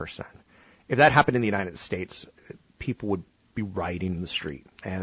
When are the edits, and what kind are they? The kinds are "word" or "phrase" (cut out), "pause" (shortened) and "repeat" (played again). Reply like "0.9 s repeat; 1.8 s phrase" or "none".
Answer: none